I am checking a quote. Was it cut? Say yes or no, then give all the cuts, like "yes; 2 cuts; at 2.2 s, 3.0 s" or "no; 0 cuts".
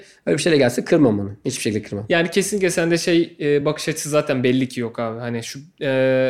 no; 0 cuts